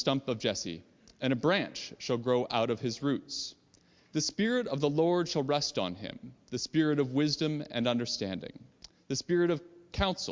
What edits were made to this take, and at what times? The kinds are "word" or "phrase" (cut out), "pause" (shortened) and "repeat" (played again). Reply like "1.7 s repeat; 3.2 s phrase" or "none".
none